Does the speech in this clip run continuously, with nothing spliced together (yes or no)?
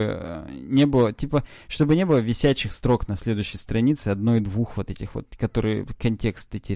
yes